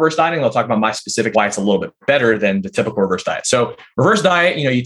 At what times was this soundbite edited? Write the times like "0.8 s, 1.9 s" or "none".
1.3 s

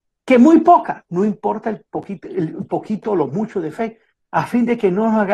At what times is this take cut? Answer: 4.1 s

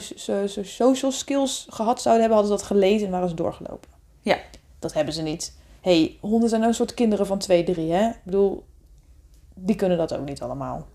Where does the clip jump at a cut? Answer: none

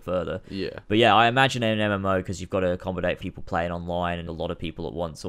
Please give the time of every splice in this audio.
3.2 s, 4.3 s

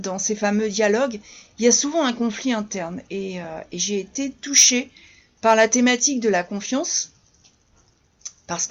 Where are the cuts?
none

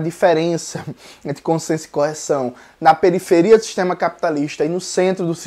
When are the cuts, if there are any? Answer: none

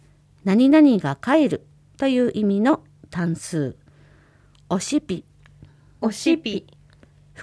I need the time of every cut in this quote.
1.8 s

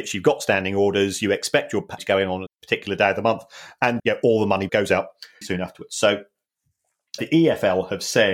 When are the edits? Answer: 2.0 s, 2.5 s, 4.0 s, 4.7 s, 5.4 s, 7.2 s

